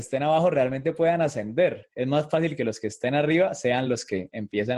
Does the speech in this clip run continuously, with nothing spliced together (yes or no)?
yes